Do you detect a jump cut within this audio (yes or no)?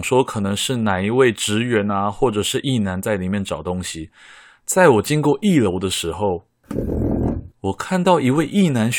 yes